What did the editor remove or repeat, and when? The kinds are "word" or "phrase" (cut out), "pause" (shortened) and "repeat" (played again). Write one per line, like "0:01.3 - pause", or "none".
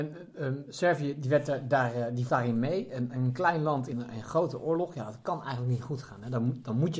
0:02.3 - word
0:03.9 - word